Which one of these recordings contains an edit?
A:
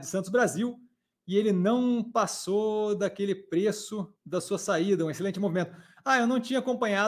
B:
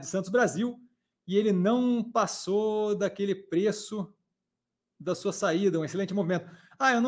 A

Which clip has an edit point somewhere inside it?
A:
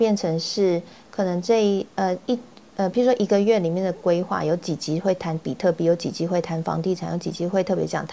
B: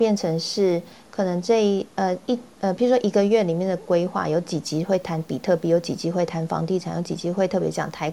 B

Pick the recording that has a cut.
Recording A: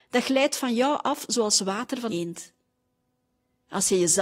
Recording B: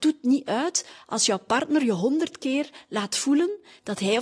A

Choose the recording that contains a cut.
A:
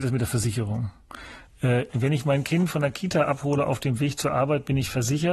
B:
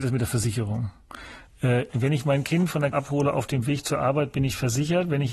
B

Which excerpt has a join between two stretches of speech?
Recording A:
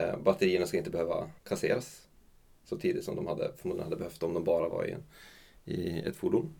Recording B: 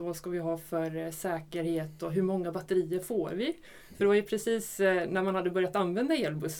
A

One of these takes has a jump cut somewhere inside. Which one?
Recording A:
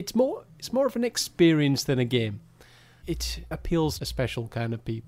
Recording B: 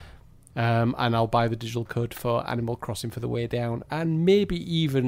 A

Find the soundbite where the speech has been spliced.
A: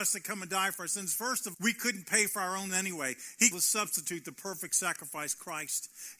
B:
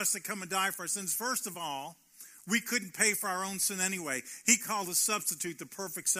A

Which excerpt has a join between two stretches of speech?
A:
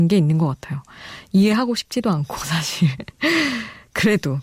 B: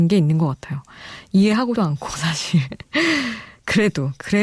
B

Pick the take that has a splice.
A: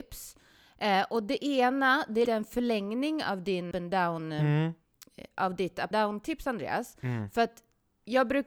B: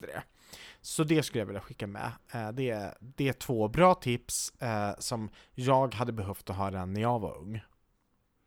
A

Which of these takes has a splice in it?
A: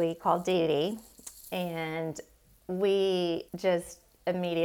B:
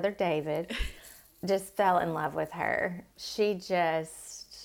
A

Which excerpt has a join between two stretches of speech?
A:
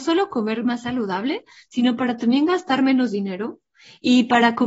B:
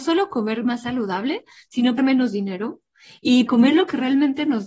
B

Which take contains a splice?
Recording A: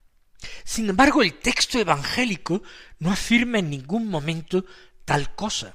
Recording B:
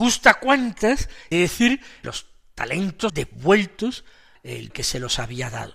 B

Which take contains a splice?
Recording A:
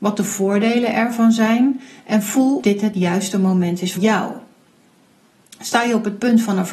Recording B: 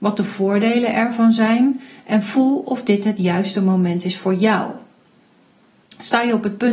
A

